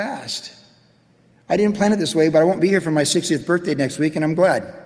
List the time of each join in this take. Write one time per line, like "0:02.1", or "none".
none